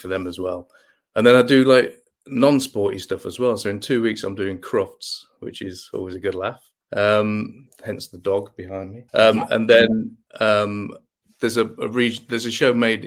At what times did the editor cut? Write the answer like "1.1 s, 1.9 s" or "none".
2.0 s, 6.8 s, 9.1 s, 10.3 s